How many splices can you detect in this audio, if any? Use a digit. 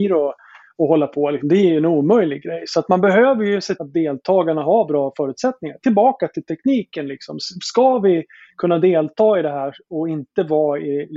1